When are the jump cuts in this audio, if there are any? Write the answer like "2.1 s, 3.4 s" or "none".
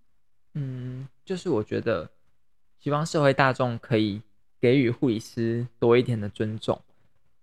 none